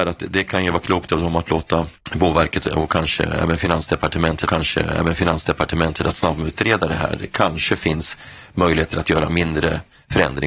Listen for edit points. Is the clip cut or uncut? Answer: cut